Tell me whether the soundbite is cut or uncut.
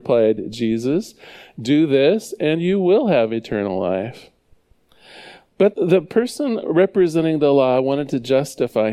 uncut